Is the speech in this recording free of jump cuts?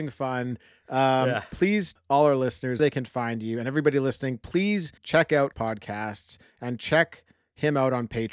no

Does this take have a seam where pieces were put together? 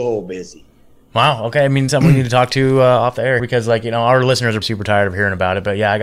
yes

